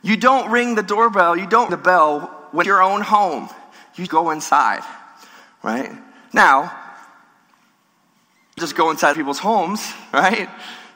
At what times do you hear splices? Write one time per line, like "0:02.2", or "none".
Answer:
0:01.7
0:02.6
0:04.1
0:08.6
0:09.1